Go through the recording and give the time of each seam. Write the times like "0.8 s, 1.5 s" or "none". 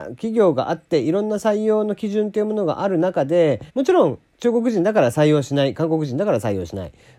3.7 s